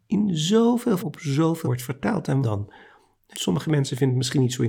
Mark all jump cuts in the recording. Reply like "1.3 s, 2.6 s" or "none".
1.0 s, 1.6 s, 2.4 s, 3.3 s